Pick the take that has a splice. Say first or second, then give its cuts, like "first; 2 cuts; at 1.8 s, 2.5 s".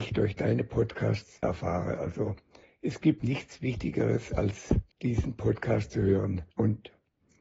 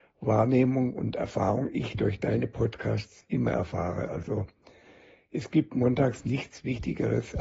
first; 5 cuts; at 1.4 s, 2.6 s, 3.2 s, 4.9 s, 6.5 s